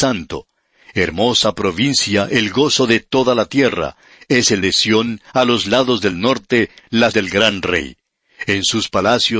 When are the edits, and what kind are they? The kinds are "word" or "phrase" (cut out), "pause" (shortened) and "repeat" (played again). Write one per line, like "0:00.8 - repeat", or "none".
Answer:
0:04.6 - word
0:07.1 - word